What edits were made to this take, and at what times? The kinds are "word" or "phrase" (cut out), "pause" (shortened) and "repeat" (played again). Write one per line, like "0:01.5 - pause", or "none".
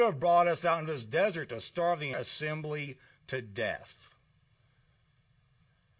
0:02.1 - word

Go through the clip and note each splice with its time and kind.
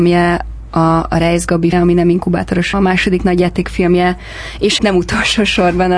0:01.7 - word
0:02.7 - word
0:04.8 - word

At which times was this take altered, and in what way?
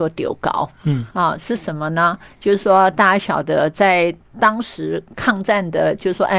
0:01.1 - pause

